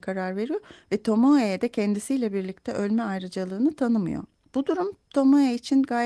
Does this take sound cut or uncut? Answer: cut